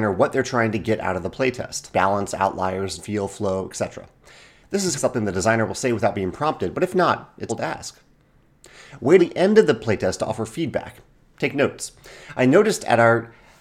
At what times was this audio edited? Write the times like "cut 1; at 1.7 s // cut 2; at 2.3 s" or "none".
cut 1; at 1.9 s // cut 2; at 3.0 s // cut 3; at 5.0 s // cut 4; at 7.5 s // cut 5; at 9.2 s